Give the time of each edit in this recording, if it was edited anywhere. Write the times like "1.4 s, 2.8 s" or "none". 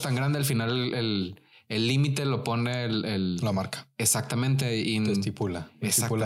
none